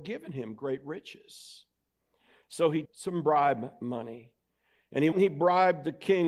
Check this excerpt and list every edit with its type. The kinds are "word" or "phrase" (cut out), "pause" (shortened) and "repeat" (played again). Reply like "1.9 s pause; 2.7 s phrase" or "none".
2.8 s word; 5.1 s word